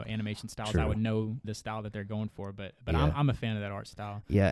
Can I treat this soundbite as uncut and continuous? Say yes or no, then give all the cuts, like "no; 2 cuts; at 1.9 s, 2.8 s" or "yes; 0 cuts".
no; 1 cut; at 1.4 s